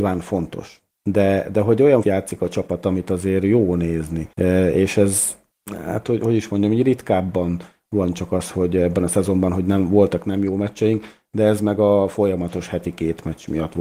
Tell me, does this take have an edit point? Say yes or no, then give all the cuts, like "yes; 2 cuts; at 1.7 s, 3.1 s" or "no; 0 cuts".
yes; 2 cuts; at 2.0 s, 4.3 s